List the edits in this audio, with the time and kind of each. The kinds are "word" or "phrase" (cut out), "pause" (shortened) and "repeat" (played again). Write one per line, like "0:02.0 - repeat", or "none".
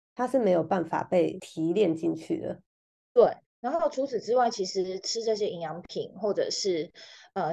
none